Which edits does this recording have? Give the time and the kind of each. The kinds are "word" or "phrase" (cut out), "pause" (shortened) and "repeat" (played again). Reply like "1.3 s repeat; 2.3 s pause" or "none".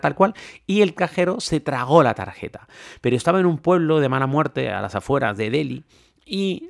none